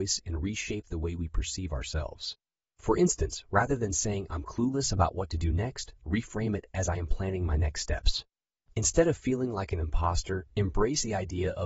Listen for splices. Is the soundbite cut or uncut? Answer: uncut